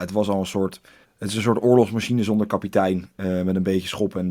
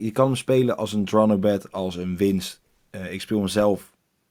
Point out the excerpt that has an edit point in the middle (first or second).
first